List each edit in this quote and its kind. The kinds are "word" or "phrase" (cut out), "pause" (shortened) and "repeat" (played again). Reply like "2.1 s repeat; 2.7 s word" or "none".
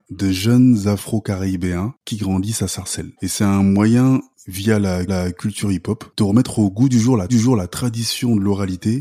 3.2 s pause; 5.1 s repeat; 7.3 s repeat